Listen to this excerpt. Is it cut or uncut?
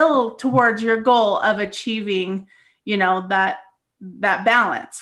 uncut